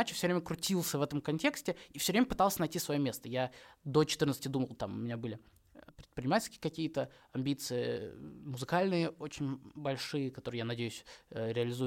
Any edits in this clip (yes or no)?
yes